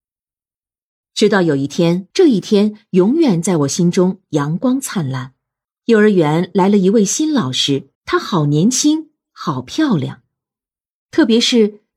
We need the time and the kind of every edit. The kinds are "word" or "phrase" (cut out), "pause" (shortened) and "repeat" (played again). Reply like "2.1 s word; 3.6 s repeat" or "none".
2.1 s pause; 5.6 s pause; 7.9 s pause